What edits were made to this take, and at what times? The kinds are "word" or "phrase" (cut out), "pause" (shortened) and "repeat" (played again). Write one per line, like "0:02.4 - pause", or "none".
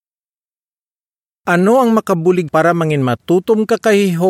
0:02.5 - phrase